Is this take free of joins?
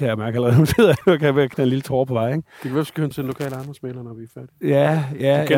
no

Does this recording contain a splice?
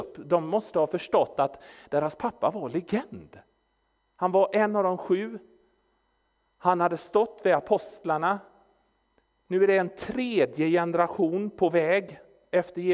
no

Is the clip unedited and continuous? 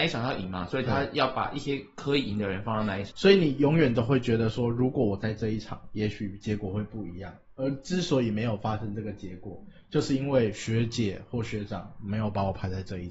yes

